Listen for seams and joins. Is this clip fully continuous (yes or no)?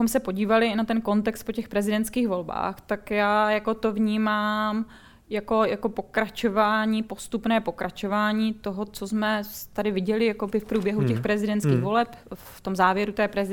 yes